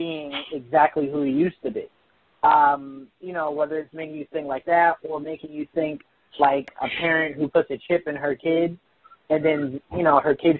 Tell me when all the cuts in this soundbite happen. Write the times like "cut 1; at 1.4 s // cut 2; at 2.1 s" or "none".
none